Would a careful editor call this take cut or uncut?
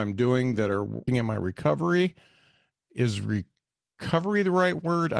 cut